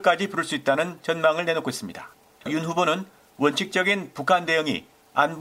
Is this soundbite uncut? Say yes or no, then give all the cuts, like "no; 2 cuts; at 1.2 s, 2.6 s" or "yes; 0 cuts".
yes; 0 cuts